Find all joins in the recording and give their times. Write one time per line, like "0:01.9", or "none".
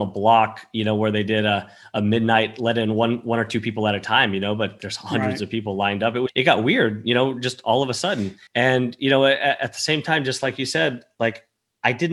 0:06.3
0:08.5